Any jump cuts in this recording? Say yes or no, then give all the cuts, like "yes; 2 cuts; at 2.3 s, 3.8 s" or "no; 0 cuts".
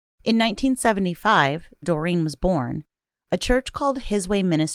yes; 1 cut; at 1.8 s